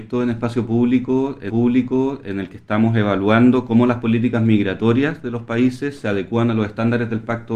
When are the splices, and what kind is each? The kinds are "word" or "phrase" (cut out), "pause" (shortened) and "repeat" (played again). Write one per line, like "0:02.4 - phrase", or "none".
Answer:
0:01.5 - repeat